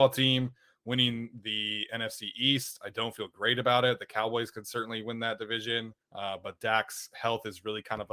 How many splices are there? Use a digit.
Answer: 1